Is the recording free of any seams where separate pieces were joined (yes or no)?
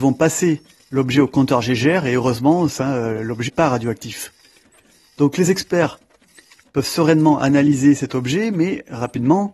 no